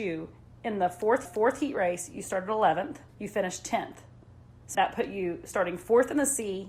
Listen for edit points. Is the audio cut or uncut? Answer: cut